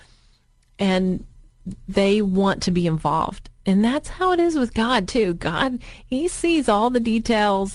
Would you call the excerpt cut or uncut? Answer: uncut